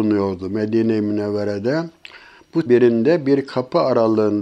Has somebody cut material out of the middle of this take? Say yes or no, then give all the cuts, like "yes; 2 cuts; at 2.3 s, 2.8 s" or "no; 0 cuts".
yes; 1 cut; at 2.7 s